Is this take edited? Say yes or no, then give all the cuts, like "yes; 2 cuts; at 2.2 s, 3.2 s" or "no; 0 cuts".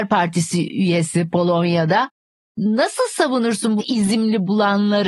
yes; 1 cut; at 3.8 s